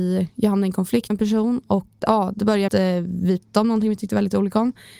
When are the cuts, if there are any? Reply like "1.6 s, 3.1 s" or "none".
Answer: 1.1 s, 2.0 s, 2.7 s, 3.5 s